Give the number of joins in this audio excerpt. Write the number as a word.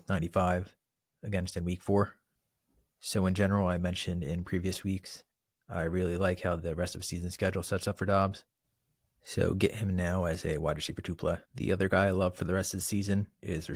one